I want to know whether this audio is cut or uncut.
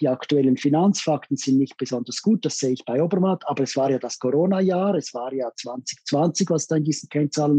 uncut